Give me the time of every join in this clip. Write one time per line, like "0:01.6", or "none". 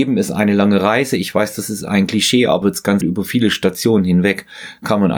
0:02.6
0:03.0

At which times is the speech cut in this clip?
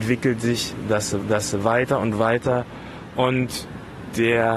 0:01.2

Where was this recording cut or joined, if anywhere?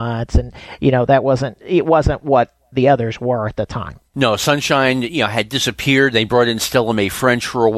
0:04.1

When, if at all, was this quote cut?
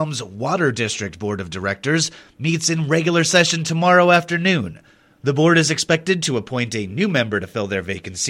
none

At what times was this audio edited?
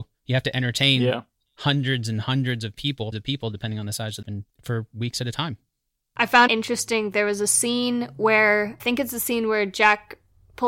0:03.1
0:04.2
0:06.5
0:08.8

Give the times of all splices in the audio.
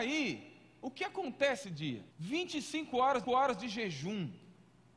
0:01.6
0:02.1
0:03.2

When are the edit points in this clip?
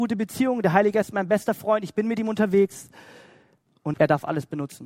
0:03.9

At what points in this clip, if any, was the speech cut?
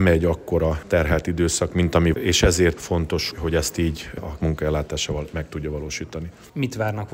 0:02.1
0:02.8
0:03.3
0:04.4

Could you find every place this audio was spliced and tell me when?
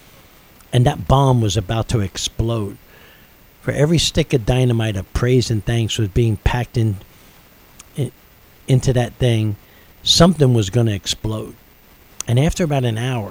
none

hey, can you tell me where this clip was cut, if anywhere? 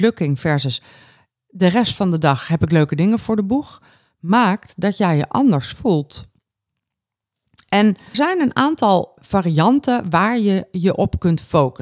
0:08.1
0:09.2

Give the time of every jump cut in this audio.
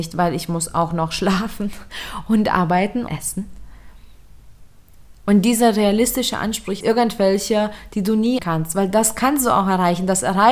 0:03.1
0:06.8
0:08.4

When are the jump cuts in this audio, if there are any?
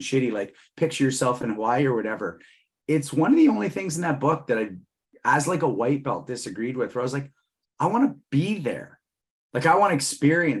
none

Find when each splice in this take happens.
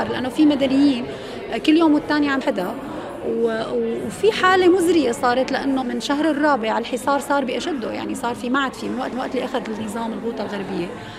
0:02.4
0:05.8
0:09.1

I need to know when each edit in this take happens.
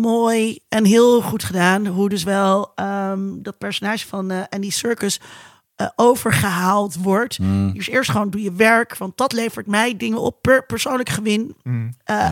none

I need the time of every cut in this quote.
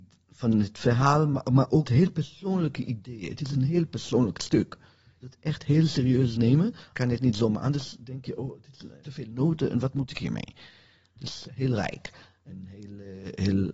0:01.8
0:05.2
0:06.9
0:09.0
0:11.4

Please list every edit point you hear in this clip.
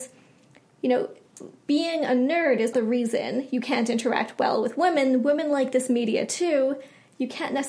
0:02.7

